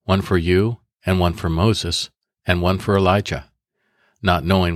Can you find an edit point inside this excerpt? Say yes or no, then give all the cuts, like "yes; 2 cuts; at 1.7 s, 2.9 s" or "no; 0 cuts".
no; 0 cuts